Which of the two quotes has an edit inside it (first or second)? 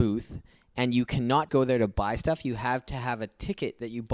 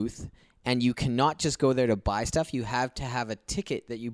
first